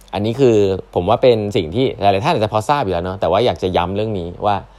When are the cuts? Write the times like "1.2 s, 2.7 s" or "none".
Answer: none